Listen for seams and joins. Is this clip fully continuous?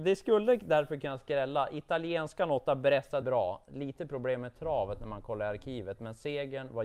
no; 1 cut; at 3.2 s

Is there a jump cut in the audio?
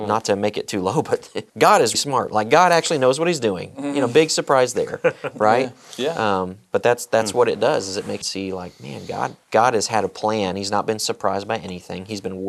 yes; 4 cuts; at 1.5 s, 1.9 s, 8.2 s, 9.4 s

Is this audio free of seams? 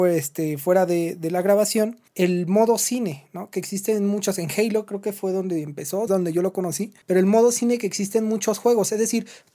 no; 3 cuts; at 2.1 s, 6.1 s, 7.0 s

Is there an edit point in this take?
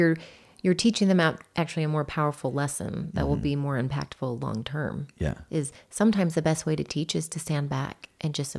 no; 0 cuts

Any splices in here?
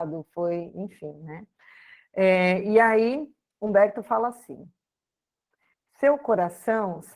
no; 0 cuts

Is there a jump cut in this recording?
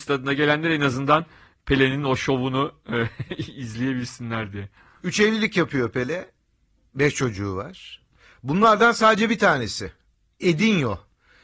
no; 0 cuts

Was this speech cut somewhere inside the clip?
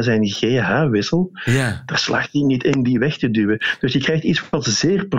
no; 0 cuts

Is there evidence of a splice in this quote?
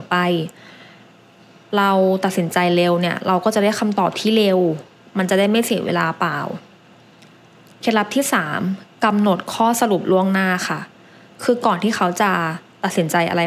no; 0 cuts

